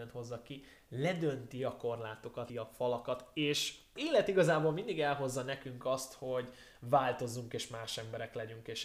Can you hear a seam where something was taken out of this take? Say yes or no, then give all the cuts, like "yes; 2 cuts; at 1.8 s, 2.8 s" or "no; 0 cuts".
yes; 2 cuts; at 2.5 s, 4.0 s